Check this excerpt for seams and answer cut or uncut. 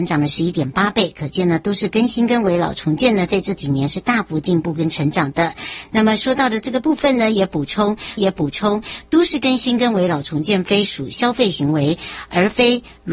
cut